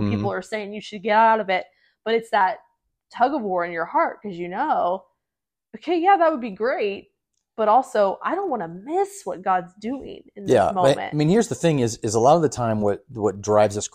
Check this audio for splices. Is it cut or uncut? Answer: uncut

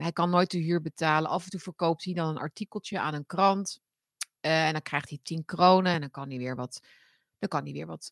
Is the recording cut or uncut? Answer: uncut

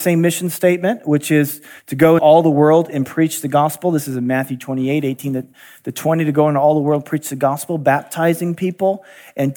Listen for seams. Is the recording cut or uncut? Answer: cut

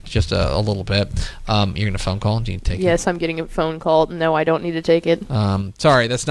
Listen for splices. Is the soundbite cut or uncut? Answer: uncut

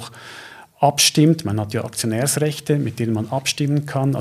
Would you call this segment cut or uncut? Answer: uncut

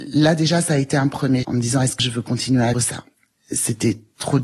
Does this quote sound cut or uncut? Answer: cut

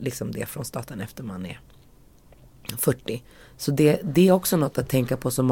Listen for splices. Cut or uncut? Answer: uncut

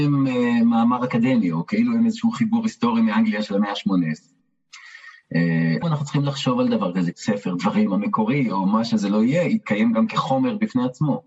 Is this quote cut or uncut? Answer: cut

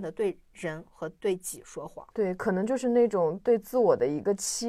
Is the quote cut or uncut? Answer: cut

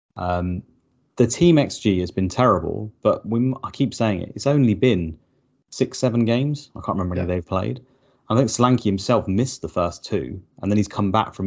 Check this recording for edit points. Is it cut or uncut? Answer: uncut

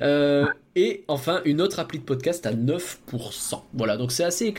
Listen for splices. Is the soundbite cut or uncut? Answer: uncut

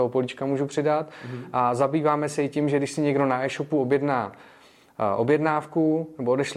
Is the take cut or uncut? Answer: uncut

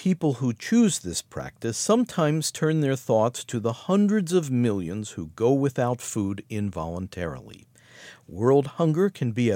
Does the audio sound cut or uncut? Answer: uncut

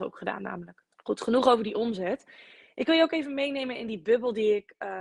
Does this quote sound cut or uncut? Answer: cut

